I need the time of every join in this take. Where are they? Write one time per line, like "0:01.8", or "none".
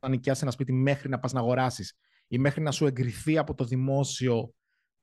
none